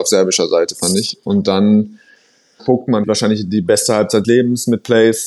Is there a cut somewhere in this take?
yes; 3 cuts; at 2.6 s, 3.0 s, 4.2 s

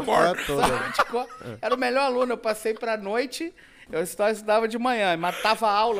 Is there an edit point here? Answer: no; 0 cuts

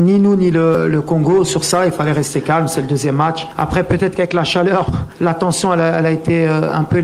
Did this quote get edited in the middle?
no; 0 cuts

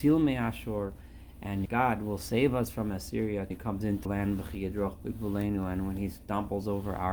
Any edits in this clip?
yes; 3 cuts; at 1.7 s, 3.5 s, 4.1 s

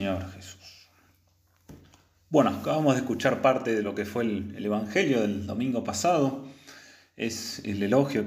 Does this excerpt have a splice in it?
no; 0 cuts

